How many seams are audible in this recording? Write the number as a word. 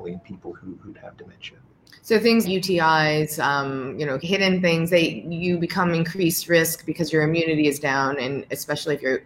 three